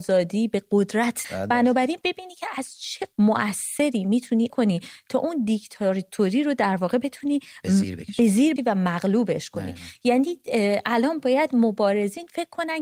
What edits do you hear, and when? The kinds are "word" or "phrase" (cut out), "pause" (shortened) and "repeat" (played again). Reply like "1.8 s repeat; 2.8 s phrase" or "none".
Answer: 1.2 s word; 2.0 s word; 3.1 s word; 4.5 s word; 8.6 s word